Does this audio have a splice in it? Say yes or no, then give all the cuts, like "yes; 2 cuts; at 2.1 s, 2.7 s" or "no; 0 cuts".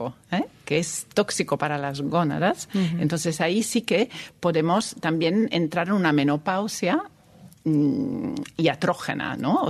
no; 0 cuts